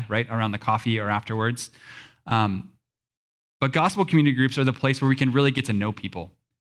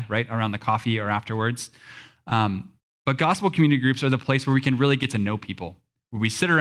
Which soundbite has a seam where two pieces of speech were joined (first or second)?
second